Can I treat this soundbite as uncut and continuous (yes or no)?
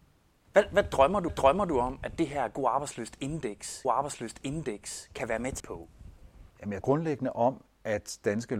no